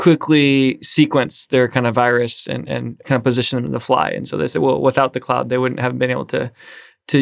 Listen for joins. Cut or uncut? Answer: uncut